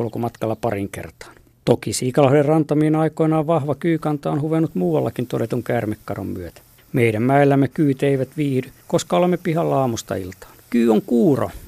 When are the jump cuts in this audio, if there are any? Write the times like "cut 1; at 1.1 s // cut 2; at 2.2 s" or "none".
cut 1; at 1.5 s // cut 2; at 6.8 s // cut 3; at 8.8 s // cut 4; at 10.6 s